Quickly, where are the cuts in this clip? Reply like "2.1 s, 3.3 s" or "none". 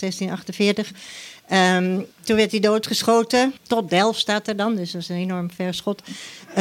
2.1 s, 3.6 s